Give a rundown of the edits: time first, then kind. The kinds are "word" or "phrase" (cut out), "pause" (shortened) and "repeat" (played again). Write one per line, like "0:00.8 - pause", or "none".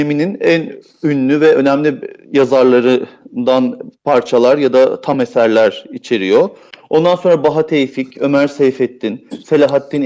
none